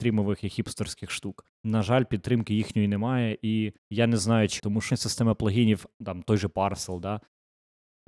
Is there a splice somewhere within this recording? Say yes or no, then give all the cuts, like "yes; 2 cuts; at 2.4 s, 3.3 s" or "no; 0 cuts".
yes; 5 cuts; at 1.5 s, 3.8 s, 4.6 s, 4.9 s, 5.9 s